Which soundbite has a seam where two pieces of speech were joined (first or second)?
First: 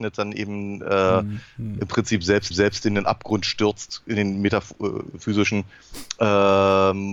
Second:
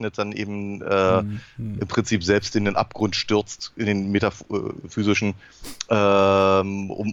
first